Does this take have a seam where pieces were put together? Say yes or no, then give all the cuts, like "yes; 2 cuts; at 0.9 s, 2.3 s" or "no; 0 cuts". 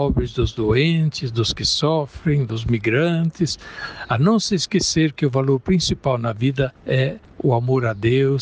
no; 0 cuts